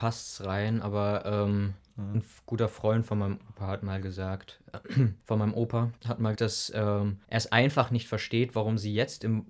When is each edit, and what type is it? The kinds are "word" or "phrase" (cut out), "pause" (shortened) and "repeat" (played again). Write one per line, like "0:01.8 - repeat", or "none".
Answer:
0:01.9 - word
0:05.2 - pause
0:06.0 - pause
0:06.4 - word
0:07.2 - pause